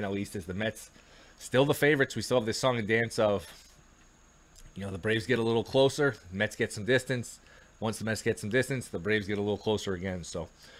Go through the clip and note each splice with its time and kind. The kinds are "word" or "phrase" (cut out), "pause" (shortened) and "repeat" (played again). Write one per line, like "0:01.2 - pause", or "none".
none